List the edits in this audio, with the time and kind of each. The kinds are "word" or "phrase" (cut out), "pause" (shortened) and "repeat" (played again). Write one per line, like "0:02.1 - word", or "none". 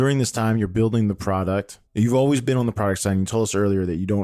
0:01.9 - pause